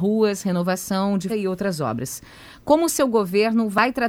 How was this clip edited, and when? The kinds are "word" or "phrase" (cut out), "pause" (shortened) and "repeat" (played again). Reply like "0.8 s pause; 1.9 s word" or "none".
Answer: 1.3 s word